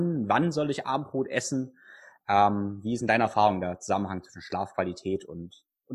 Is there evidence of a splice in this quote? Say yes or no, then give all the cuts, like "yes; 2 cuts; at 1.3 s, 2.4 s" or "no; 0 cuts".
no; 0 cuts